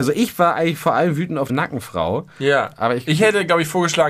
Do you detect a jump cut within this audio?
yes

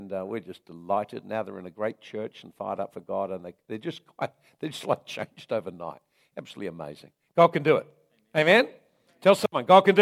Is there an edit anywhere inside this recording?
no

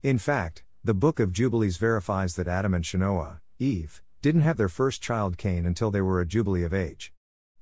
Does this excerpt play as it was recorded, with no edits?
yes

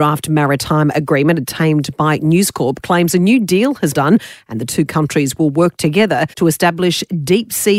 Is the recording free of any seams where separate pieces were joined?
no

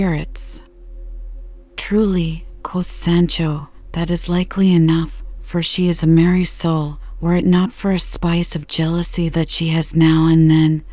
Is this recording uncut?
yes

